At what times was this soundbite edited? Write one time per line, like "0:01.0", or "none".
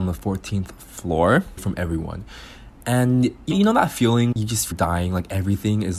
0:01.6
0:03.5
0:04.3
0:04.7